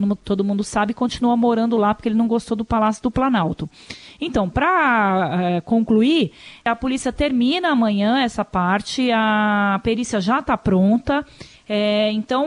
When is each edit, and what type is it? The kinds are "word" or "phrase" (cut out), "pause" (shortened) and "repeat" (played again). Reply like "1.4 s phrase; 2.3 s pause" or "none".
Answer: none